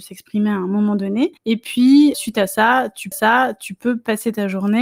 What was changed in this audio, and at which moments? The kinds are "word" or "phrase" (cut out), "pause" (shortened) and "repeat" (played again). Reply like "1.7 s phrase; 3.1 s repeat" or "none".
1.4 s pause; 2.1 s word; 3.1 s repeat